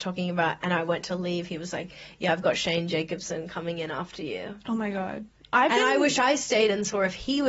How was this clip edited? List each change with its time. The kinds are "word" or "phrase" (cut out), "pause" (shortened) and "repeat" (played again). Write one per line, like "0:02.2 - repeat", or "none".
none